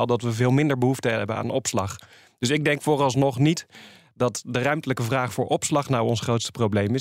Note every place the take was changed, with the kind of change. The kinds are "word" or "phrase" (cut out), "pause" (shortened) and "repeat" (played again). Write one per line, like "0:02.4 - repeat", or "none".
none